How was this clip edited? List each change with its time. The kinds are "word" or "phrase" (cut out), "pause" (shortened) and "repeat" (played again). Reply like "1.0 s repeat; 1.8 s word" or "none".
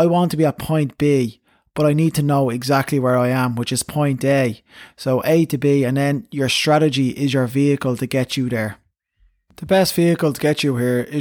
none